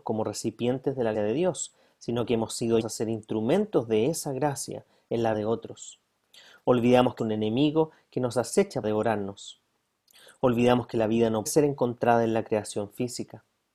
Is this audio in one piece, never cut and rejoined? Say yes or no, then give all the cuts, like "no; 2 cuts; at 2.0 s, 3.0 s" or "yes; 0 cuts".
no; 6 cuts; at 1.1 s, 2.8 s, 5.3 s, 7.2 s, 8.8 s, 11.5 s